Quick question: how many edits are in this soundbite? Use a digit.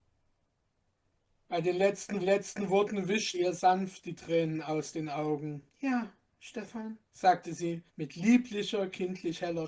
5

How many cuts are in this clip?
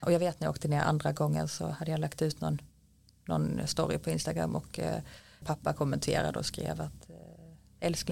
0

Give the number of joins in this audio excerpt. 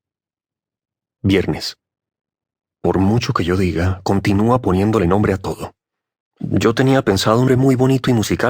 1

